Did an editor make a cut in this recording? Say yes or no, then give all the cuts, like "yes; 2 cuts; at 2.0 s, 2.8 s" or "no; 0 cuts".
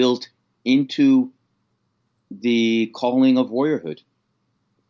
no; 0 cuts